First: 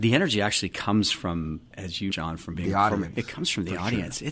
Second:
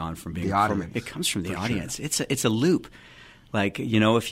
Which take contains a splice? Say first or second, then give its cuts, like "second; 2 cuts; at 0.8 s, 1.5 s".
first; 2 cuts; at 1.7 s, 2.1 s